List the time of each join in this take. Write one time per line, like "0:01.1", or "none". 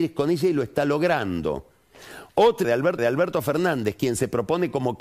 0:02.6
0:03.0